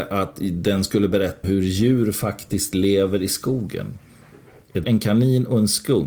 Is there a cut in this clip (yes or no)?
yes